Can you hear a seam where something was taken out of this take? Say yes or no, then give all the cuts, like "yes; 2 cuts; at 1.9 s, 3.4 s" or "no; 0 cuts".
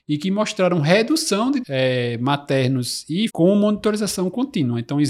yes; 2 cuts; at 1.6 s, 3.3 s